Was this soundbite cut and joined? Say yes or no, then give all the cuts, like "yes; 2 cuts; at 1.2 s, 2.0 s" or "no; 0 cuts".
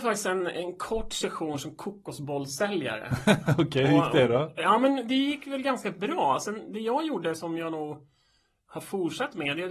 no; 0 cuts